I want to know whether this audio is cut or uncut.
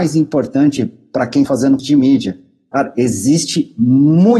cut